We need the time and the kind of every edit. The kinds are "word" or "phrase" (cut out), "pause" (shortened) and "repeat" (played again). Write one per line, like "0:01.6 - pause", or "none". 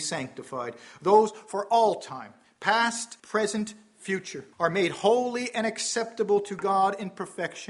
0:03.2 - pause
0:04.5 - pause